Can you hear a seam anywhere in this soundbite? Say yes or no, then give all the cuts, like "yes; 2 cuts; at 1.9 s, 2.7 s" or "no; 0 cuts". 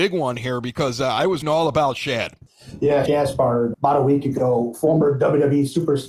yes; 3 cuts; at 1.4 s, 3.1 s, 3.7 s